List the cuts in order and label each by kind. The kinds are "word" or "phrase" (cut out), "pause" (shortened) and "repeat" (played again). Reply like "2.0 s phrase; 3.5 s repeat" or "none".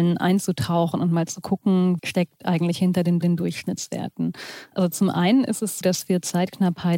2.0 s word; 3.2 s repeat; 5.8 s word